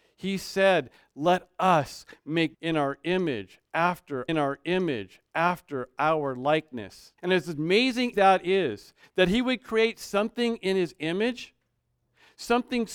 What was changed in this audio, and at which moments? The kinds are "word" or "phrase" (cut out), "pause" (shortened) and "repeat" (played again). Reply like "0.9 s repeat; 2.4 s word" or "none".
2.5 s word; 4.3 s repeat; 7.2 s pause; 8.1 s word